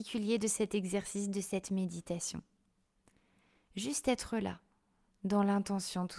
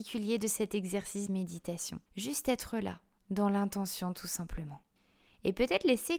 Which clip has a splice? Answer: second; 4 cuts; at 1.3 s, 2.1 s, 3.2 s, 5.0 s

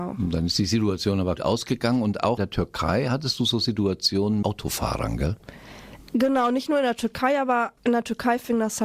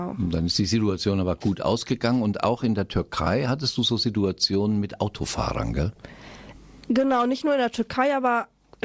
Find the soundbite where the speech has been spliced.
first; 5 cuts; at 1.4 s, 2.4 s, 4.4 s, 6.1 s, 7.8 s

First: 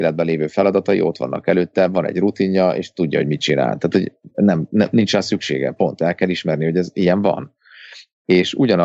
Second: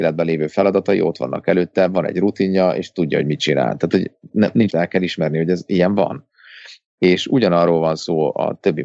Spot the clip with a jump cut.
second; 2 cuts; at 4.3 s, 4.7 s

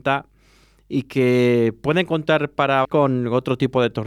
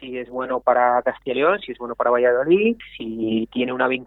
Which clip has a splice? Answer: first; 1 cut; at 2.8 s

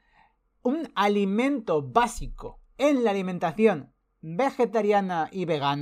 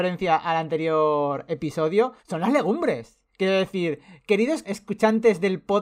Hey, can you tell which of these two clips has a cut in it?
second; 3 cuts; at 2.2 s, 3.3 s, 4.6 s

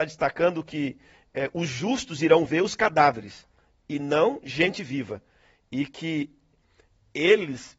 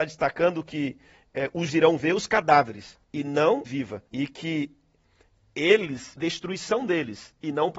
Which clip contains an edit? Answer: second; 5 cuts; at 1.7 s, 3.0 s, 3.7 s, 4.1 s, 6.2 s

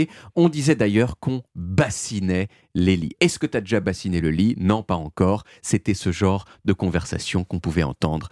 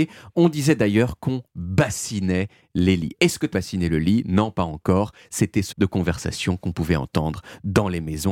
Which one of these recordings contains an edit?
second; 2 cuts; at 3.5 s, 5.7 s

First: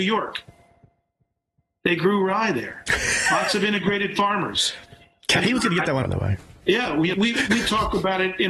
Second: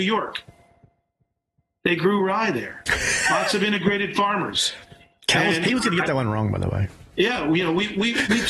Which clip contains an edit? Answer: first; 3 cuts; at 5.4 s, 6.0 s, 7.1 s

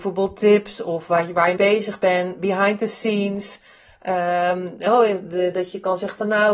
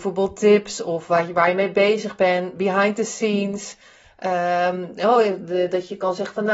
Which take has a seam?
first; 1 cut; at 1.6 s

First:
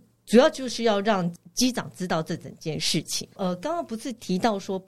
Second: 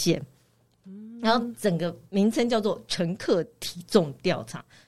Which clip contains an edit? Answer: first; 1 cut; at 3.3 s

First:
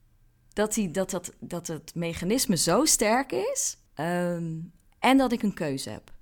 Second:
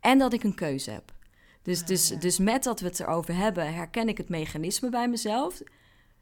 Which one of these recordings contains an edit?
first; 1 cut; at 3.9 s

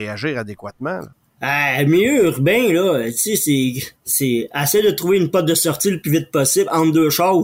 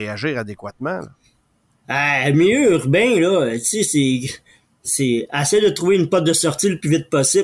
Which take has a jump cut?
first; 2 cuts; at 1.1 s, 4.0 s

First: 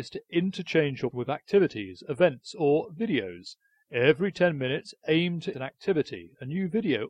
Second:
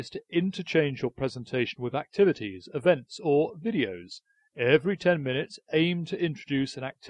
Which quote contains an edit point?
first; 2 cuts; at 1.1 s, 5.5 s

